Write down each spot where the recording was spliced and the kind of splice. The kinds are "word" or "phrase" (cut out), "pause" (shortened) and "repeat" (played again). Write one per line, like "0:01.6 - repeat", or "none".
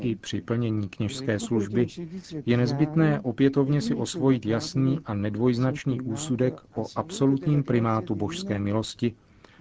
none